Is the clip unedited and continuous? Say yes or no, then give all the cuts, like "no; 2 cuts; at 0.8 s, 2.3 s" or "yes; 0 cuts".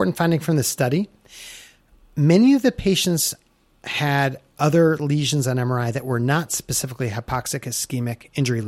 yes; 0 cuts